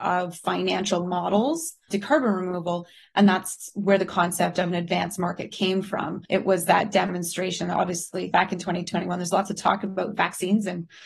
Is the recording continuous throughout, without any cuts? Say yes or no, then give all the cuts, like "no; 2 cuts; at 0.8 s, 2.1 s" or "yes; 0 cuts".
no; 4 cuts; at 1.9 s, 5.5 s, 6.3 s, 8.3 s